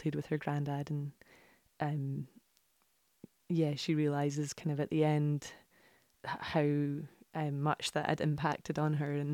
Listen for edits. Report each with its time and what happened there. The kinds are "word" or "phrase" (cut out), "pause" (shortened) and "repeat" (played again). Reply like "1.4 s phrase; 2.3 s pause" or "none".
none